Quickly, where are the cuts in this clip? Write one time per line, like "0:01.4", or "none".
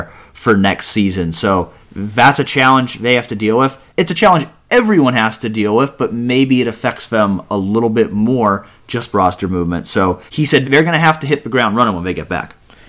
0:01.8
0:03.9
0:09.1
0:10.3
0:10.6